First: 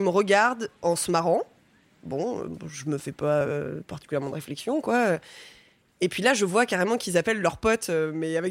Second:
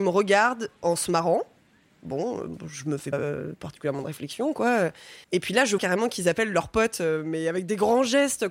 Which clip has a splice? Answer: second; 3 cuts; at 3.1 s, 5.2 s, 5.8 s

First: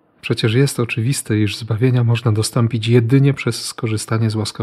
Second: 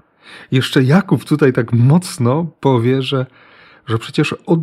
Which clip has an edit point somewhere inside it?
second; 1 cut; at 2.6 s

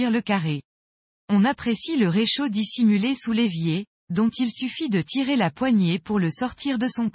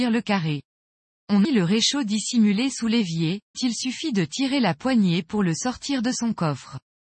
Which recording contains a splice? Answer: second; 2 cuts; at 1.4 s, 3.5 s

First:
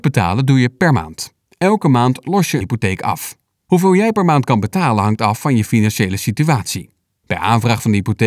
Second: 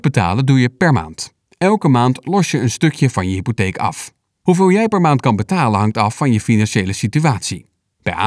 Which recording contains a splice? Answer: first; 1 cut; at 2.6 s

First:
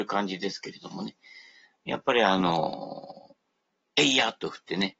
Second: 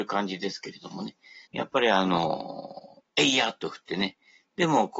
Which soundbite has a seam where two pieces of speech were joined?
second; 2 cuts; at 1.5 s, 3.1 s

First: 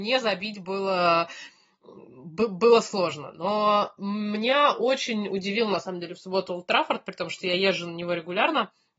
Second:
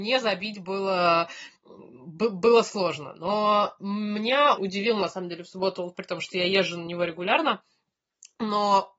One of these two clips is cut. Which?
second; 3 cuts; at 1.6 s, 4.6 s, 5.9 s

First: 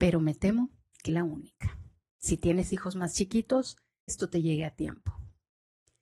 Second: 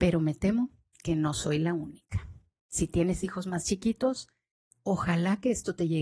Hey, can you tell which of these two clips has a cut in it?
first; 2 cuts; at 1.1 s, 4.1 s

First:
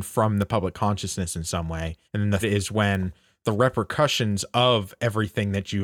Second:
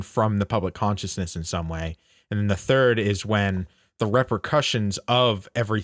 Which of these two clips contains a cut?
first; 2 cuts; at 2.0 s, 2.4 s

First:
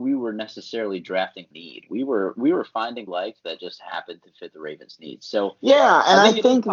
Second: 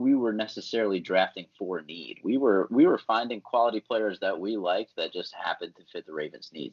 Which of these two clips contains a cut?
first; 2 cuts; at 1.5 s, 3.1 s

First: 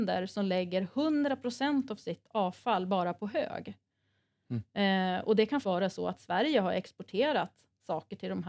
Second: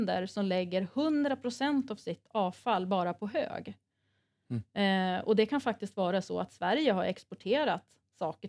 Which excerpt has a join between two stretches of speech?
first; 1 cut; at 5.6 s

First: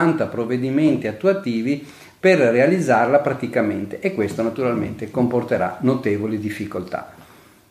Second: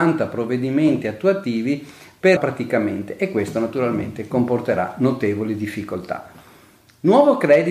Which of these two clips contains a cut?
second; 1 cut; at 2.4 s

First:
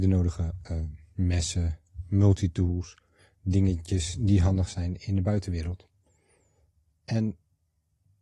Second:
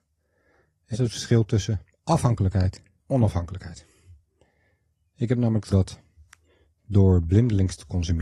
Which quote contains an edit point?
second; 3 cuts; at 0.9 s, 3.0 s, 5.7 s

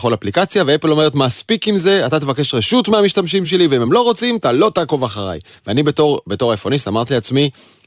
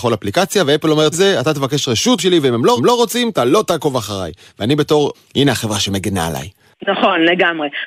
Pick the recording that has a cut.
second; 4 cuts; at 1.1 s, 2.2 s, 2.8 s, 5.1 s

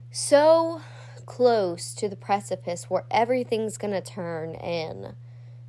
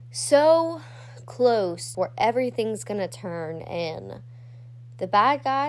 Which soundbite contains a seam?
second; 1 cut; at 1.9 s

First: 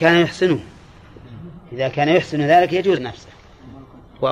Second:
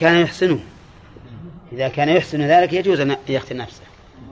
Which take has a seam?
first; 1 cut; at 3.0 s

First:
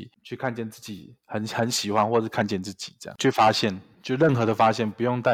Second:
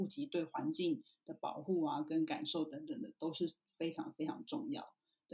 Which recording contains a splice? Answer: first; 1 cut; at 3.2 s

